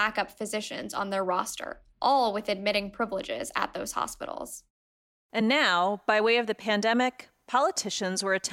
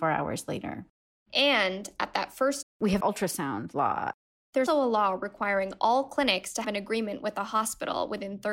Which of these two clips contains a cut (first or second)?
second